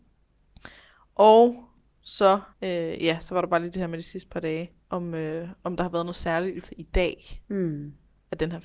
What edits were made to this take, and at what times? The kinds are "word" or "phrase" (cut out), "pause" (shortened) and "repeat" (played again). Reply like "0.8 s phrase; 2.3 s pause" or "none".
2.5 s pause; 4.8 s pause; 6.6 s word